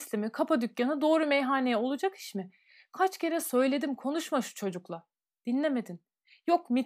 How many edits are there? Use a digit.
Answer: 0